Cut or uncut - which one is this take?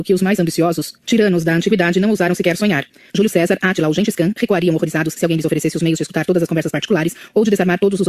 uncut